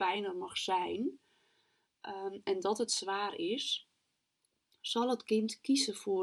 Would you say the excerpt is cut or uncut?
uncut